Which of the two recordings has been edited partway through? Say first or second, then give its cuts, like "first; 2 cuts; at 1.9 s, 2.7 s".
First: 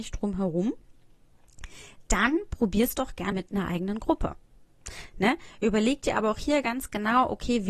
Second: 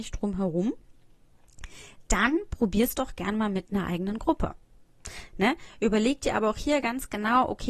first; 1 cut; at 3.3 s